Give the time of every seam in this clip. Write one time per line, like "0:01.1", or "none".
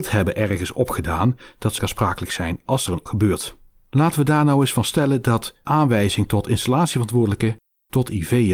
0:01.8
0:03.1
0:05.7

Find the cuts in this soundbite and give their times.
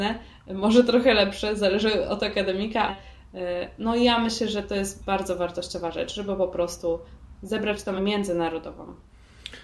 0:02.9
0:07.4
0:08.0

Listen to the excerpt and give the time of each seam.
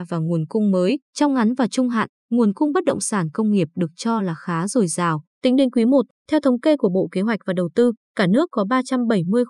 0:01.1
0:05.3

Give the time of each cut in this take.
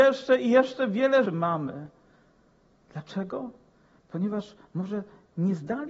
0:01.3

